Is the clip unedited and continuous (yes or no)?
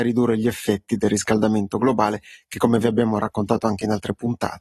yes